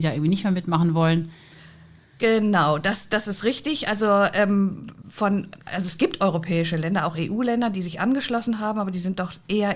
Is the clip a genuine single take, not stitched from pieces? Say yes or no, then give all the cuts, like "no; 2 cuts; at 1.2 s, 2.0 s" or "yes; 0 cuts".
yes; 0 cuts